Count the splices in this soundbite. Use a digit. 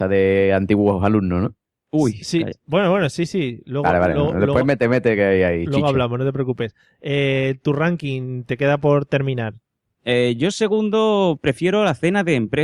0